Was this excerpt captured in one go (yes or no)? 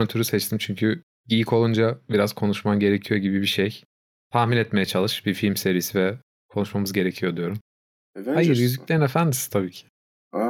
yes